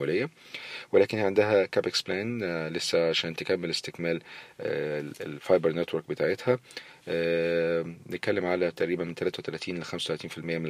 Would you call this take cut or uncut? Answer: uncut